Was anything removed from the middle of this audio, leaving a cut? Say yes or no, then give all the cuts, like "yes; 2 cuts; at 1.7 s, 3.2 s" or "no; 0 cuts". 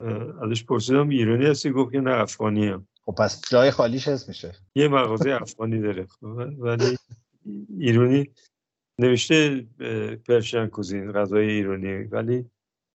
no; 0 cuts